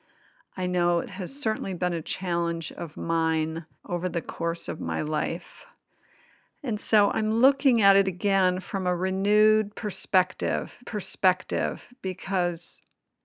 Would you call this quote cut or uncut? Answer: cut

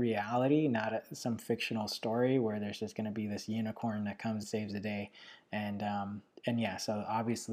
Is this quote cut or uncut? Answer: cut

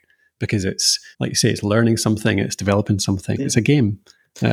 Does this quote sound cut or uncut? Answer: cut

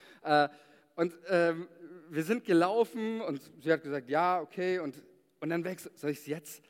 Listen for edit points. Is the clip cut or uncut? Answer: uncut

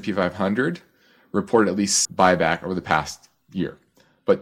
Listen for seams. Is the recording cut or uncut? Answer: cut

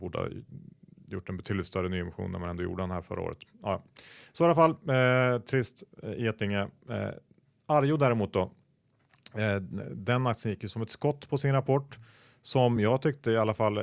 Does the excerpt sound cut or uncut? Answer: uncut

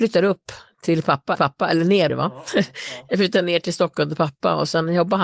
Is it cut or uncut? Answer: cut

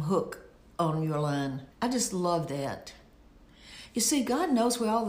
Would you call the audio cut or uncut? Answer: cut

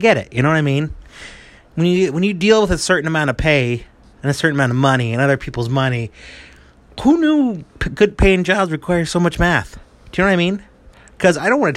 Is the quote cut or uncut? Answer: uncut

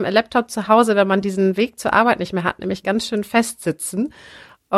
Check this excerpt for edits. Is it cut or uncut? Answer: uncut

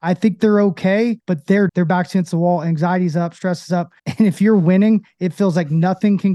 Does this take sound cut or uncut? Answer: cut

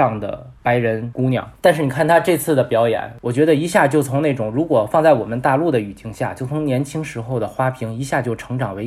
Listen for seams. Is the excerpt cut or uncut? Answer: uncut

